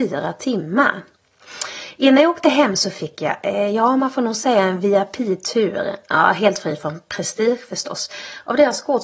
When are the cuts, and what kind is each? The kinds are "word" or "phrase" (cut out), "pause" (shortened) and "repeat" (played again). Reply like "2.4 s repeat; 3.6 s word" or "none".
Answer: none